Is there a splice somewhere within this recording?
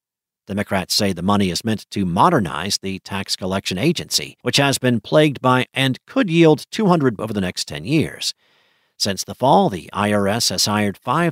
yes; 3 cuts; at 4.4 s, 5.7 s, 7.2 s

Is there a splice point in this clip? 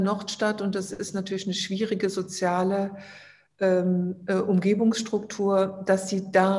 no; 0 cuts

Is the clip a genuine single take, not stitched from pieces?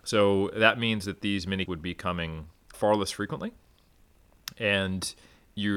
no; 2 cuts; at 1.6 s, 2.7 s

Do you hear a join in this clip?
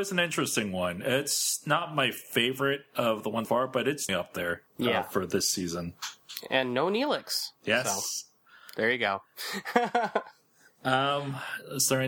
yes; 3 cuts; at 3.4 s, 4.1 s, 4.7 s

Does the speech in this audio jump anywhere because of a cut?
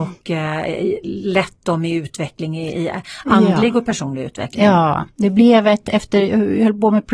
no; 0 cuts

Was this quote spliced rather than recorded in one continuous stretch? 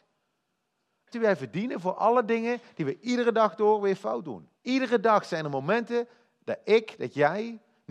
yes; 2 cuts; at 1.1 s, 4.6 s

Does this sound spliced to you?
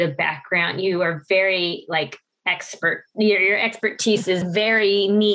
no; 0 cuts

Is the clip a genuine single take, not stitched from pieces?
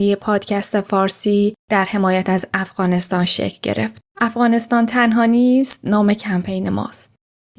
no; 1 cut; at 4.1 s

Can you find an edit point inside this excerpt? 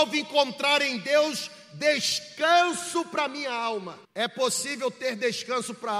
yes; 1 cut; at 4.0 s

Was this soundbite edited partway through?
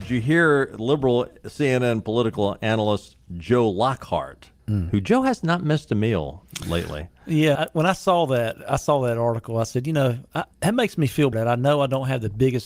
yes; 4 cuts; at 4.6 s, 7.6 s, 10.5 s, 11.3 s

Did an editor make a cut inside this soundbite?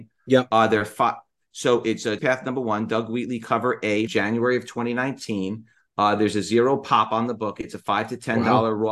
yes; 2 cuts; at 2.2 s, 4.1 s

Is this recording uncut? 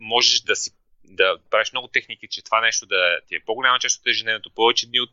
yes; 0 cuts

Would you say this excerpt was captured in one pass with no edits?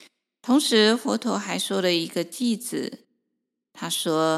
no; 1 cut; at 3.0 s

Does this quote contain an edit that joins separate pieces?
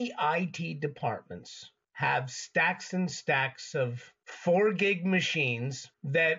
no; 0 cuts

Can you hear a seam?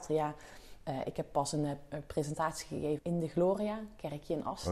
yes; 1 cut; at 3.0 s

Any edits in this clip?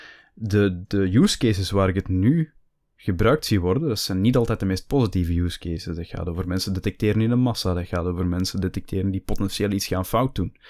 no; 0 cuts

